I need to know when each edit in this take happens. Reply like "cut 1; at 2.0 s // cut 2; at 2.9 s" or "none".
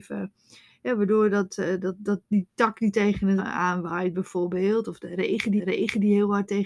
cut 1; at 3.4 s // cut 2; at 5.6 s